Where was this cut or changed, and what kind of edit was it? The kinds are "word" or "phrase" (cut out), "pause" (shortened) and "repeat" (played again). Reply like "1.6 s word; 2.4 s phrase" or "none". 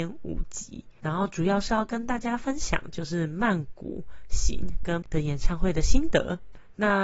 5.0 s word